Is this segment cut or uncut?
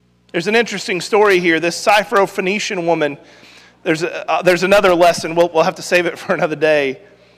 uncut